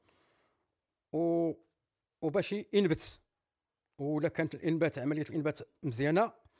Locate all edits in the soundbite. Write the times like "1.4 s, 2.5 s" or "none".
none